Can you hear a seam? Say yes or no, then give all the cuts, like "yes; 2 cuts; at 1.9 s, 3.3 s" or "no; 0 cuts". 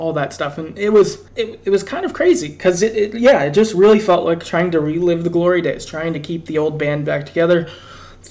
yes; 1 cut; at 1.3 s